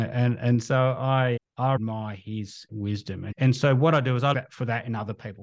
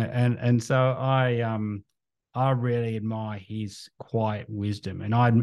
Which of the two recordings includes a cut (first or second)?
first